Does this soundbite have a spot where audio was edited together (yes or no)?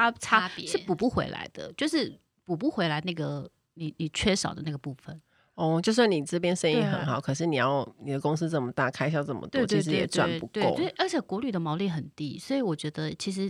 no